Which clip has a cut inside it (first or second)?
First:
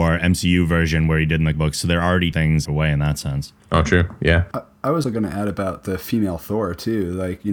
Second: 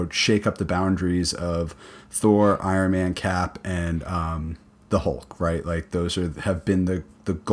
first